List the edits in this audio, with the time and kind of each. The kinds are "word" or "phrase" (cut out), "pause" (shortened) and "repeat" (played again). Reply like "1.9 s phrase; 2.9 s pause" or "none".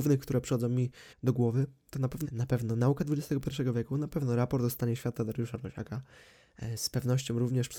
1.1 s pause; 2.2 s phrase

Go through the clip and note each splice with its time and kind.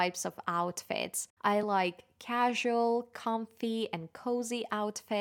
none

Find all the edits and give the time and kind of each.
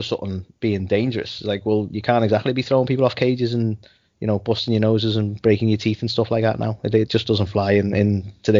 none

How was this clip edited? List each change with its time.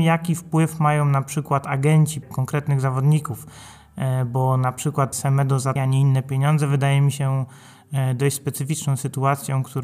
2.2 s phrase; 5.1 s word; 5.8 s word

